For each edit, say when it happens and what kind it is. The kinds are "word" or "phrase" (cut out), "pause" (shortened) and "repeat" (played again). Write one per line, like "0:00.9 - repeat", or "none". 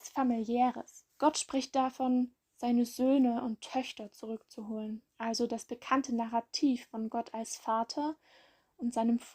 0:01.1 - pause
0:05.1 - pause